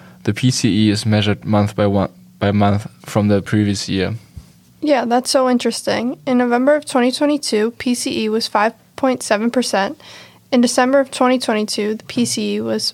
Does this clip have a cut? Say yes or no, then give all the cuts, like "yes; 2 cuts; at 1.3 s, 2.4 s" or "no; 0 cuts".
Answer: no; 0 cuts